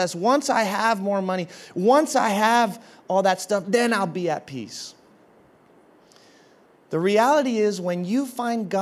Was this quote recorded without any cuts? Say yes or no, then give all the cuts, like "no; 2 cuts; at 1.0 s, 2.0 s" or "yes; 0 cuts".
yes; 0 cuts